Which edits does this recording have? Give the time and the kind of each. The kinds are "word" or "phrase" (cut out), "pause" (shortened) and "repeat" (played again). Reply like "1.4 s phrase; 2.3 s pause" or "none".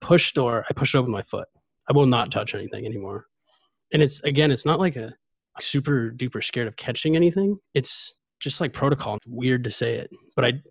5.6 s word; 9.2 s phrase